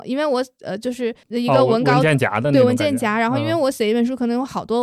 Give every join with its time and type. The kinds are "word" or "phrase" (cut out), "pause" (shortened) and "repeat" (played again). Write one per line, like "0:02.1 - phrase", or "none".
0:01.2 - pause

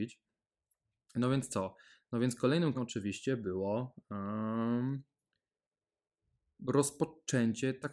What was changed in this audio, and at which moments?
0:02.7 - word

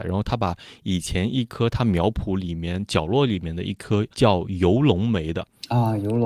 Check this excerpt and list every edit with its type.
0:04.1 - pause

